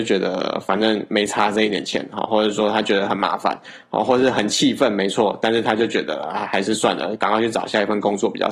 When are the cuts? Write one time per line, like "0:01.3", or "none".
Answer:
none